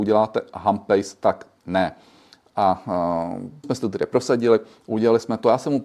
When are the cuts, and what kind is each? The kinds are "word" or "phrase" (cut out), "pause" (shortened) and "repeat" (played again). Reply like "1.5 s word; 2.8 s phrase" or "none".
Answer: 1.6 s word; 3.6 s word